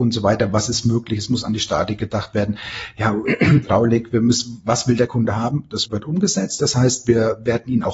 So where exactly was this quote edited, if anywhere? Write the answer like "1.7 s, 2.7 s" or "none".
5.9 s